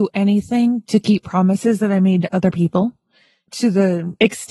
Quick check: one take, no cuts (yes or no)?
yes